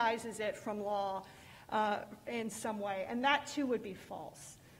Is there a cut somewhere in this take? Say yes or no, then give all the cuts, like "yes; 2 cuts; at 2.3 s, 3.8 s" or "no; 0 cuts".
no; 0 cuts